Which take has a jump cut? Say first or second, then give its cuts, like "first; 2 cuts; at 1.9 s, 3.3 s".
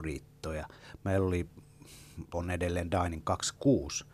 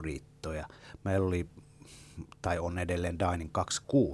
first; 1 cut; at 2.3 s